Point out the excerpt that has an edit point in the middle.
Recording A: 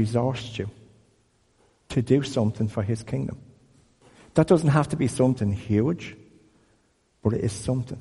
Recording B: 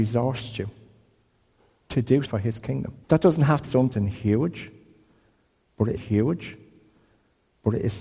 B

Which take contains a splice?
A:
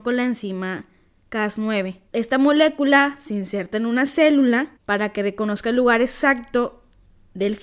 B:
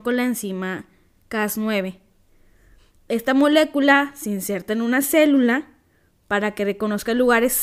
A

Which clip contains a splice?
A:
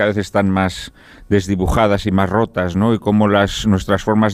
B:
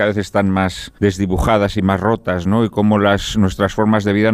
B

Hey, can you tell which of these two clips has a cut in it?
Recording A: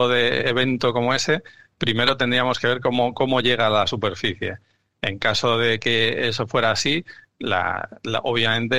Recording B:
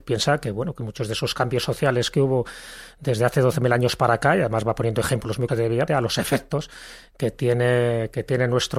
B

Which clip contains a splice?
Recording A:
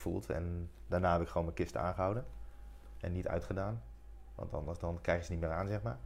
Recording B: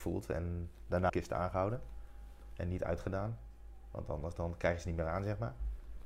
B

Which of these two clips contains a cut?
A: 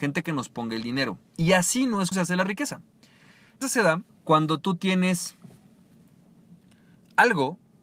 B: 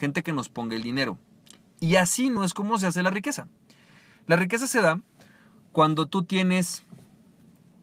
A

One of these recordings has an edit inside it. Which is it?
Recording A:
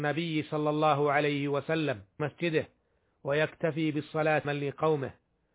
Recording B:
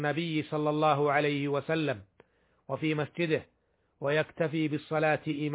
A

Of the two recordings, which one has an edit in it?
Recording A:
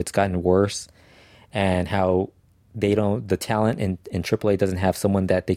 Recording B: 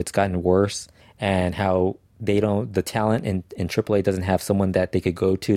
B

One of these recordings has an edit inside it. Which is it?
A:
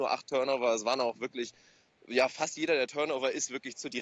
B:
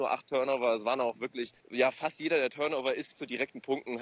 B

